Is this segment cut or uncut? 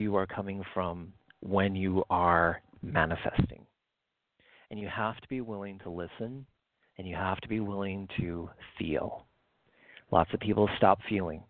uncut